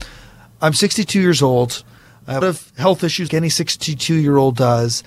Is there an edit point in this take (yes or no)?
yes